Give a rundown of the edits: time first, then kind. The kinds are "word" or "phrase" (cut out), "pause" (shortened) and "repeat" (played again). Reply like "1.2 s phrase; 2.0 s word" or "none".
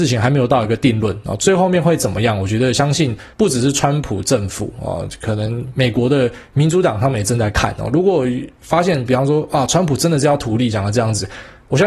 3.3 s pause; 10.7 s phrase